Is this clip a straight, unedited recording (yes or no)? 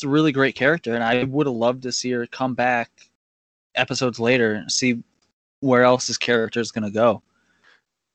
yes